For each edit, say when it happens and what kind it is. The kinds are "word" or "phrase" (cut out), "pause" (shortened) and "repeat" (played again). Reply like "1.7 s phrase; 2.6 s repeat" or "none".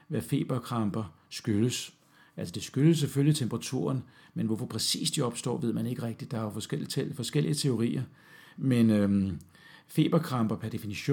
none